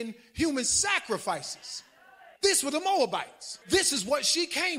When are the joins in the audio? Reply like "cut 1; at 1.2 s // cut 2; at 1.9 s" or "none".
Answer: cut 1; at 2.4 s // cut 2; at 3.6 s